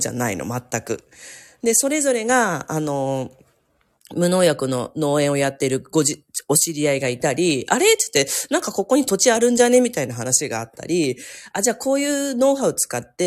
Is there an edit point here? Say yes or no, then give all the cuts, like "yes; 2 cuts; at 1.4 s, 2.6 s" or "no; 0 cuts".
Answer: no; 0 cuts